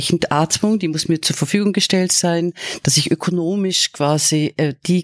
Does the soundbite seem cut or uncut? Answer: uncut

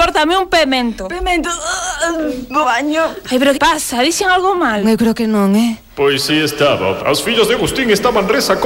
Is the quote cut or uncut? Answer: cut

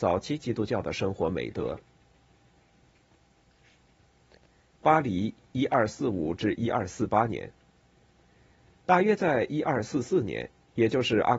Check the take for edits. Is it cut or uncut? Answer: uncut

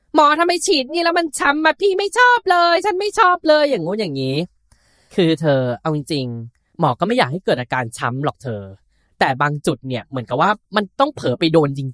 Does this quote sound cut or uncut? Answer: cut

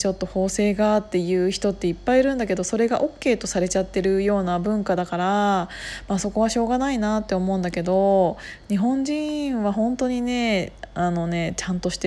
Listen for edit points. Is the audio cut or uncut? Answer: uncut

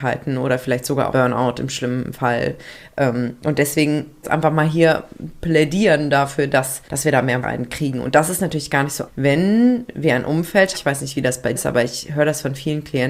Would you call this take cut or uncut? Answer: cut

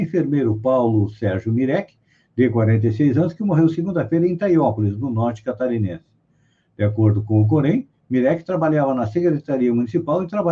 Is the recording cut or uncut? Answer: uncut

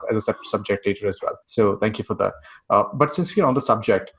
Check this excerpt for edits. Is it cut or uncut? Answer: cut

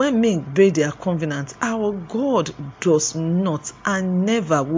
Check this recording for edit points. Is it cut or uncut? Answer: uncut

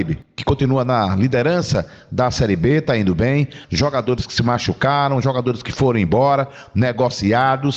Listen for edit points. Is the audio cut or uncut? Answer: cut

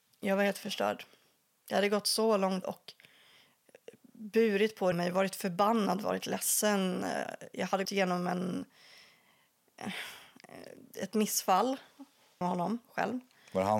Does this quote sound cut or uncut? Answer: cut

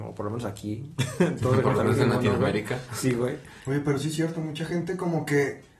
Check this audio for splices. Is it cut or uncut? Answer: uncut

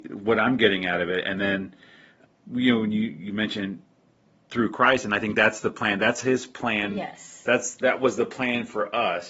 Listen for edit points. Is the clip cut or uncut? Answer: uncut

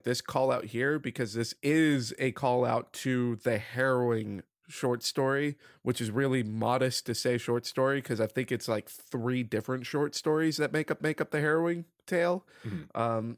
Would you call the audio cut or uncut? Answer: cut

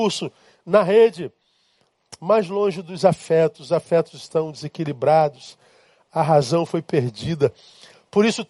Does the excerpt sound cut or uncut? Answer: uncut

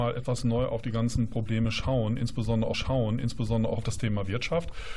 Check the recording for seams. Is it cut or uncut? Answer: cut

